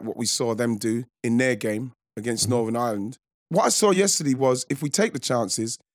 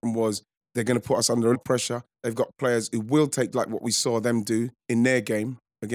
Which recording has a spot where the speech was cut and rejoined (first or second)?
second